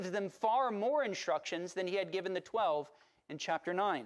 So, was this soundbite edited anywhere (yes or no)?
no